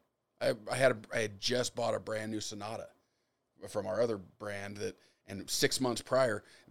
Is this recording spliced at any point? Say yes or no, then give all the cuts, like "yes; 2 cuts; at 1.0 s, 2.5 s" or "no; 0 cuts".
no; 0 cuts